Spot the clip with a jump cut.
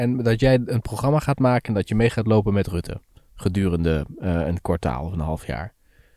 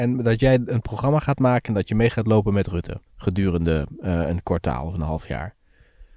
second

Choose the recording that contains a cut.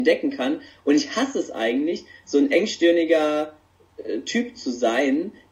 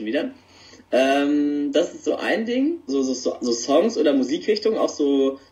second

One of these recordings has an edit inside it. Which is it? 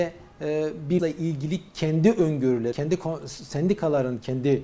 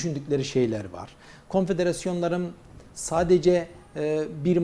first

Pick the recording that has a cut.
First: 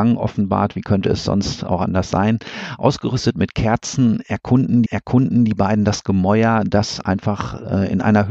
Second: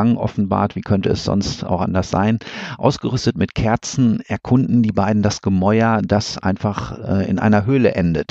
first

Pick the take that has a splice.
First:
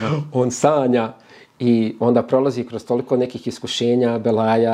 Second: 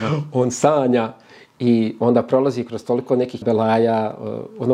second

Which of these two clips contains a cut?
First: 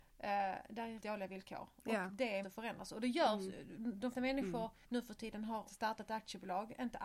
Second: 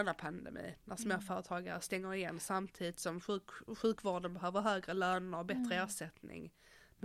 first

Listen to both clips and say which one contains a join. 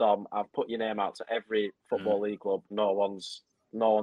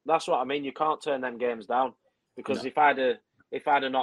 first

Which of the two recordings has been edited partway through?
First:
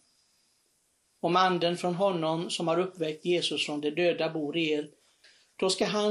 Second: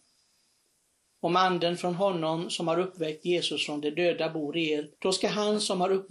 second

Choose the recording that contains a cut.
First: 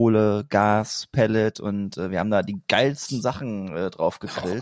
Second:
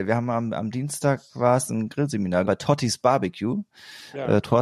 second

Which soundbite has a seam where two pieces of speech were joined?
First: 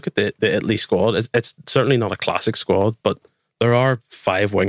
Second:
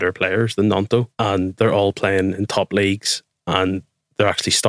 second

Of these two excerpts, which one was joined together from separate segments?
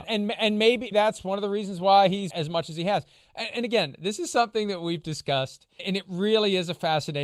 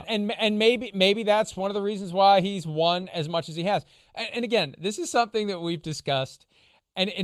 first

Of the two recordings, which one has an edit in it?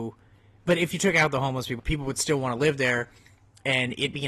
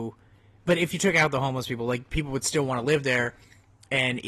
first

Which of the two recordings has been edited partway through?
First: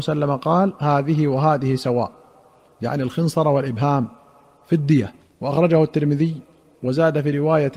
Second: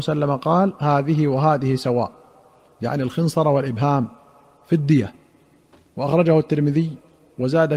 first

